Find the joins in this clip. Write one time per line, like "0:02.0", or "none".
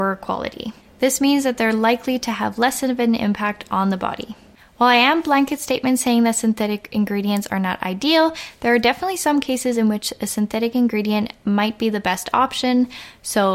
none